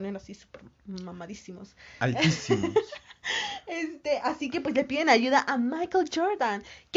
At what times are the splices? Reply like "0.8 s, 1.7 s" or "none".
none